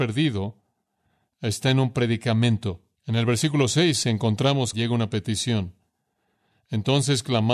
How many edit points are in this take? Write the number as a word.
two